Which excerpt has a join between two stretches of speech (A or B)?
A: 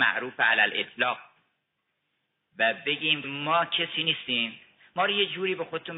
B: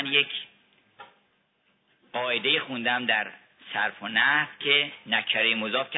A